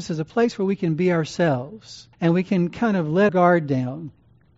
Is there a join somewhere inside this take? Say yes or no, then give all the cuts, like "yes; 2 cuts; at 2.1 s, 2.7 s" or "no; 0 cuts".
yes; 2 cuts; at 2.1 s, 3.3 s